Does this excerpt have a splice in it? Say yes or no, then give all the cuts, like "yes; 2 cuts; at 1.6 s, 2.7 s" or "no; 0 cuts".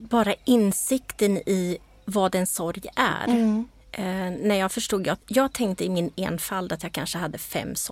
no; 0 cuts